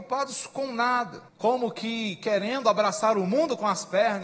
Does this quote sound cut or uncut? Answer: cut